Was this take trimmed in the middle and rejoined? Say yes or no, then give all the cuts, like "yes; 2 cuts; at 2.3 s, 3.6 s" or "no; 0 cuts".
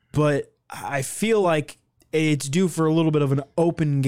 no; 0 cuts